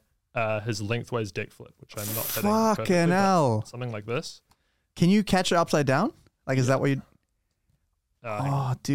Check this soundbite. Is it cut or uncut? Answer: uncut